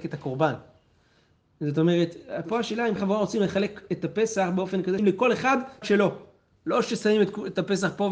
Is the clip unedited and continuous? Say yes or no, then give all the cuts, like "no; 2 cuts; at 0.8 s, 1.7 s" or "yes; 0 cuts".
no; 3 cuts; at 3.0 s, 5.0 s, 5.8 s